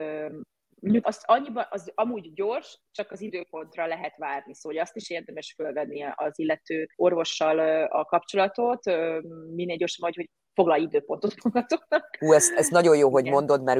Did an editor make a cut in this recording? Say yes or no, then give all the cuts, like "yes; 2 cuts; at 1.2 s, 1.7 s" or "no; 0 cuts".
yes; 2 cuts; at 1.0 s, 6.9 s